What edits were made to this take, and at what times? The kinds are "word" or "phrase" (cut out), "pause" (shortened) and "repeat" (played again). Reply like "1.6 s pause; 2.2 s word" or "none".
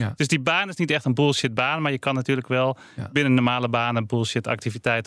none